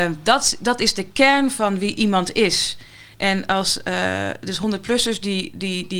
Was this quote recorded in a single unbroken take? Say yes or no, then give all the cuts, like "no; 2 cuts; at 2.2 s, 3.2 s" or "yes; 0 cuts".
no; 1 cut; at 3.1 s